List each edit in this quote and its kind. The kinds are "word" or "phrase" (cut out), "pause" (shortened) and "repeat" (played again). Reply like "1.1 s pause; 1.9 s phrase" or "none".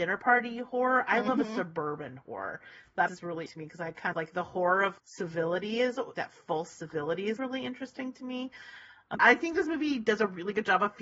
3.1 s word; 3.5 s word; 4.1 s word; 5.0 s word; 6.1 s word; 7.4 s word; 9.2 s word